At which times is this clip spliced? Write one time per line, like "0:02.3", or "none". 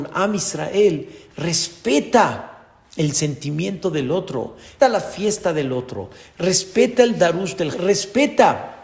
0:04.8
0:07.7